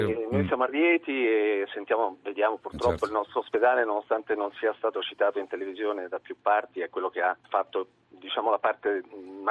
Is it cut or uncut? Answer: cut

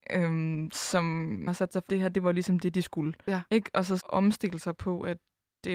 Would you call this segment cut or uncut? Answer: cut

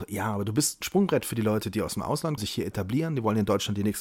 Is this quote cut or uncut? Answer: cut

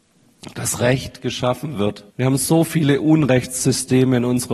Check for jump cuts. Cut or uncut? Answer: cut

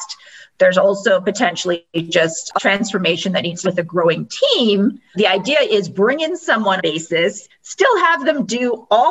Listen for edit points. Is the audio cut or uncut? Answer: cut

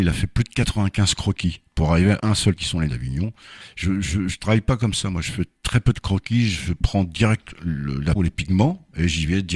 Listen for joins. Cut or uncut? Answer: cut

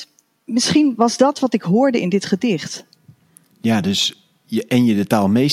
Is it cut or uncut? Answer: uncut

